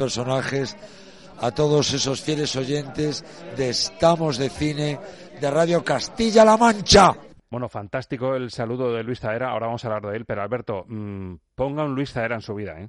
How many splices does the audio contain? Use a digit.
0